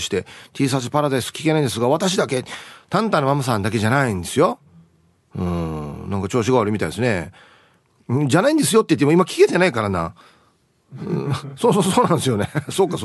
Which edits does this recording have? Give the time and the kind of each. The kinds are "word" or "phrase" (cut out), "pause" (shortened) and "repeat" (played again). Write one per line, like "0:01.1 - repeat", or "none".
none